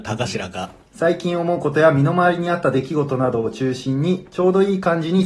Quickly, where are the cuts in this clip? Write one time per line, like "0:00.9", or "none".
none

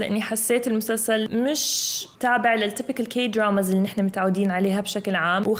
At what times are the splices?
0:02.1

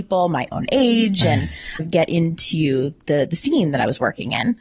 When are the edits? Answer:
0:01.8

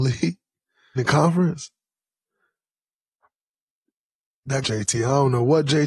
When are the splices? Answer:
0:01.0
0:04.6

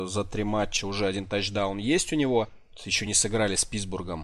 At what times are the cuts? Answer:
none

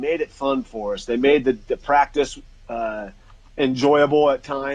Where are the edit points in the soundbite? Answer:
none

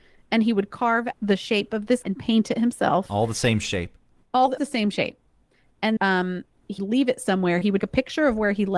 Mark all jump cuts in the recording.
0:01.1
0:02.0
0:04.6
0:06.0
0:06.8
0:07.8

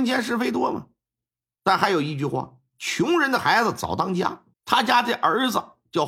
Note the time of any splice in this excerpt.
0:04.5

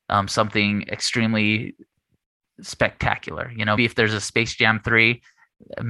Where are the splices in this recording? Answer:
0:03.8

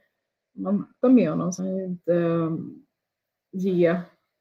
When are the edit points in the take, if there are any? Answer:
0:01.0
0:01.6

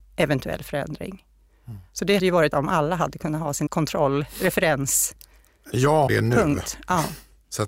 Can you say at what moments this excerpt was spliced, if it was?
0:02.2
0:02.5
0:03.7
0:06.1

